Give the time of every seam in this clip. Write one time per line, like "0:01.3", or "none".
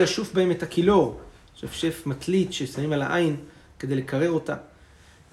none

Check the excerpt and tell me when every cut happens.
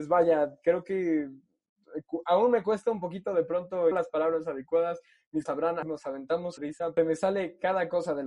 0:03.9
0:05.5
0:05.8
0:06.6
0:07.0

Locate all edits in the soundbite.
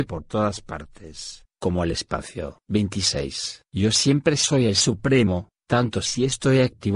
none

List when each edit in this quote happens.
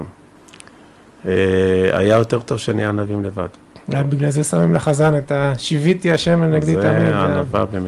0:03.8

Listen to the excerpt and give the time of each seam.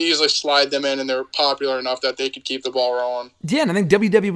none

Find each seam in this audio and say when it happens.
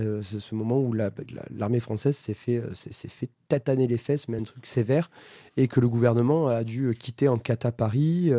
none

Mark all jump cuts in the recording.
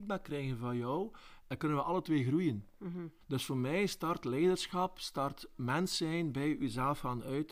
0:03.2

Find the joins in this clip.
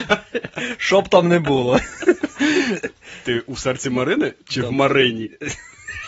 0:04.4

